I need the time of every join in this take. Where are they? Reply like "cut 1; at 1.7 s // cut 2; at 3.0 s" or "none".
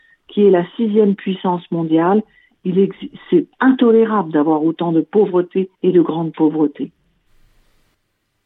cut 1; at 3.5 s // cut 2; at 5.7 s